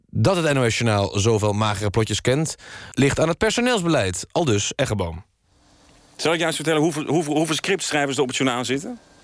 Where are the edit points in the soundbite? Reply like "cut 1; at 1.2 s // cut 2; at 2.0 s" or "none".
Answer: none